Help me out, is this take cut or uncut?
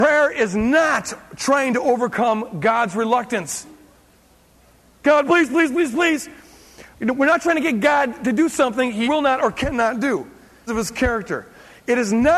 cut